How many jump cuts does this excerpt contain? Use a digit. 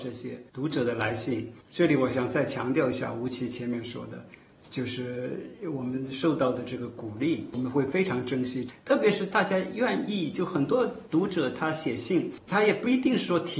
1